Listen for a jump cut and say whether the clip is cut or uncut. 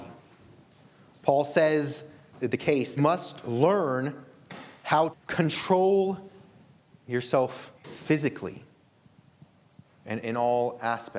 cut